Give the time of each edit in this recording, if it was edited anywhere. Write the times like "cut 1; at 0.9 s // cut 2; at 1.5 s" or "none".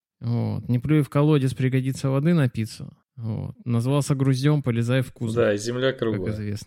none

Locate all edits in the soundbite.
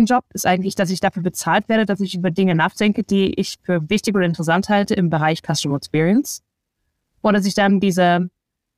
none

